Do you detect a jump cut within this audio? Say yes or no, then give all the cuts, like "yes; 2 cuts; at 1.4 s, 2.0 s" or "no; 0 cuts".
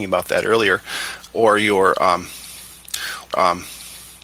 yes; 2 cuts; at 1.3 s, 3.3 s